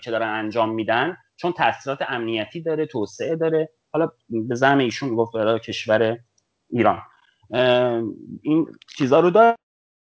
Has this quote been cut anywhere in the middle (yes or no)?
no